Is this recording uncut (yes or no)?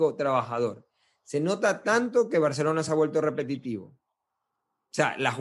yes